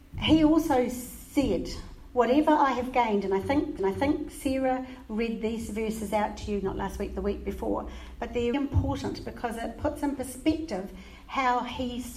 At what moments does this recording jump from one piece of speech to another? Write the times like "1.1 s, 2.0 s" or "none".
3.8 s, 8.5 s